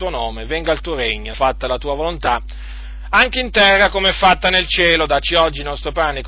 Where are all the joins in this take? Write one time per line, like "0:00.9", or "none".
0:01.3